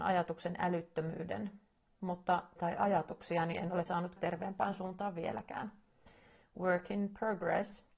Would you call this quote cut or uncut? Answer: cut